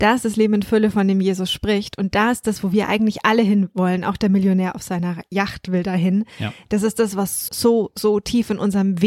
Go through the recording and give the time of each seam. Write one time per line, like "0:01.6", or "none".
0:07.5